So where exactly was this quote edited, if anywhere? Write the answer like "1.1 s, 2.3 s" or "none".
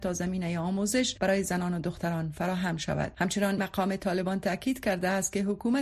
3.6 s